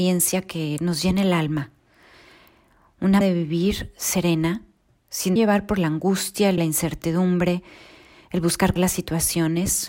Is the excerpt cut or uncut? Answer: cut